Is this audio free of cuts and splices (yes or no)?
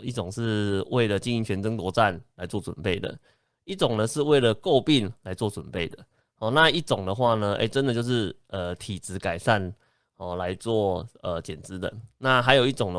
yes